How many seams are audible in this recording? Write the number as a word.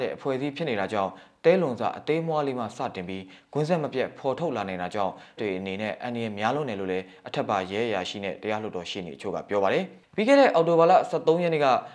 one